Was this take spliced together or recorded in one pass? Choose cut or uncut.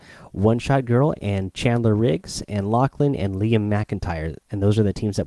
uncut